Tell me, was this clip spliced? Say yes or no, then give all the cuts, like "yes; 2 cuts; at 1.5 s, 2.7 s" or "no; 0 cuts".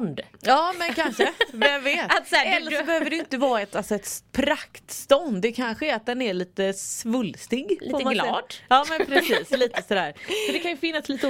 no; 0 cuts